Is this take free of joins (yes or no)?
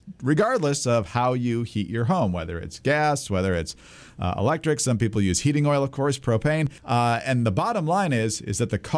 no